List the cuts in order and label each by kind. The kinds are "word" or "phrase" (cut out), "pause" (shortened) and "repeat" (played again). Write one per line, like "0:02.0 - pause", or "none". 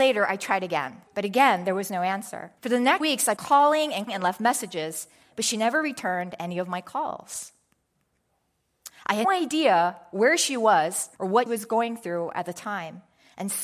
0:01.1 - pause
0:02.6 - pause
0:03.0 - word
0:03.4 - word
0:04.1 - word
0:09.2 - word
0:11.1 - pause
0:11.5 - word